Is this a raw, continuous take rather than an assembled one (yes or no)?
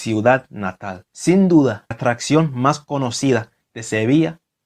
no